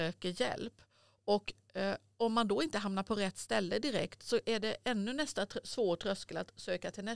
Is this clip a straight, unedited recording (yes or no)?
yes